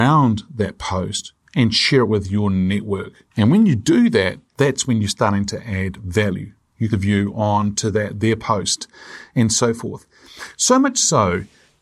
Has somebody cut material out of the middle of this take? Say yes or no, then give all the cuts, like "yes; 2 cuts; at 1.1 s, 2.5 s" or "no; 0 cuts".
yes; 2 cuts; at 3.3 s, 6.9 s